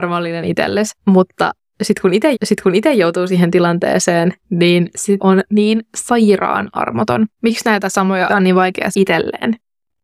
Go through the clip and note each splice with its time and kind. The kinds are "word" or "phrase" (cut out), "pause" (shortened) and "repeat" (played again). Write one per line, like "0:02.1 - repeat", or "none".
0:01.0 - pause
0:02.3 - repeat
0:04.4 - pause
0:05.2 - word
0:07.3 - pause
0:08.3 - word
0:08.9 - word